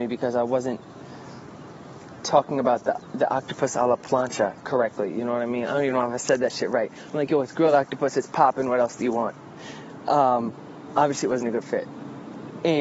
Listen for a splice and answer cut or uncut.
uncut